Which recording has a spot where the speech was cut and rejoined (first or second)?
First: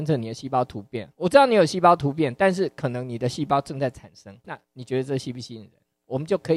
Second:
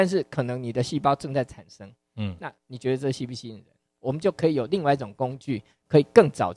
first